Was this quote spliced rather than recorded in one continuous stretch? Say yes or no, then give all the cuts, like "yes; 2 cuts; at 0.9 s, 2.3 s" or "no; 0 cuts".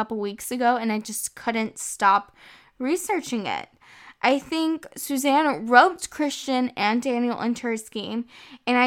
no; 0 cuts